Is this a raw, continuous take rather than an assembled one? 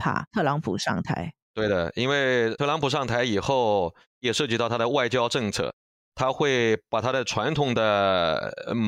no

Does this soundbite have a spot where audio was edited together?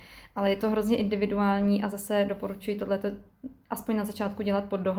no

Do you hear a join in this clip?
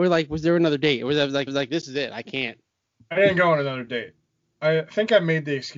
yes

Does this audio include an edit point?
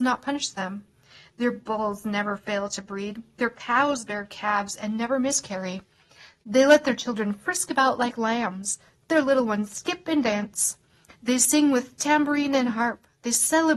no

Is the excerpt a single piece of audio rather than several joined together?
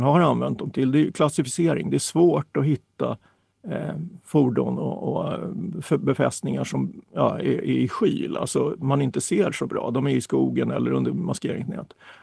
no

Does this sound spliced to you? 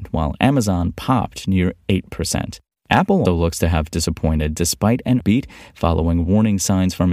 yes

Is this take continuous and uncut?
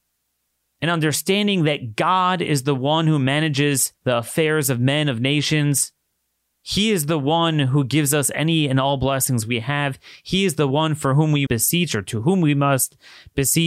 no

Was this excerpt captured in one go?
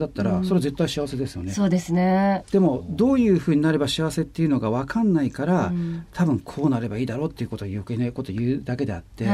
yes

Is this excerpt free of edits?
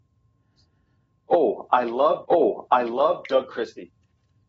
no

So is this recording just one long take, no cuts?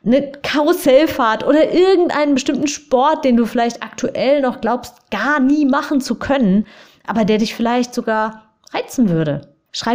yes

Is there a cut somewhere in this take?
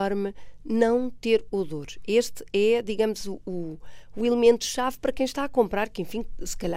no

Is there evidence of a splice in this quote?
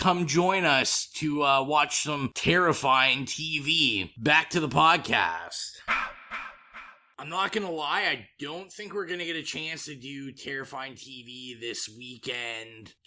no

